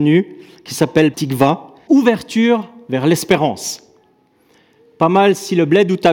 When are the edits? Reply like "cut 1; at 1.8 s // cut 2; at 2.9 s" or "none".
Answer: cut 1; at 1.1 s // cut 2; at 1.9 s